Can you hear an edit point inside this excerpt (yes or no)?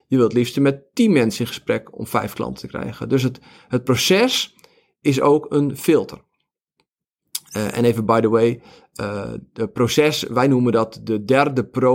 no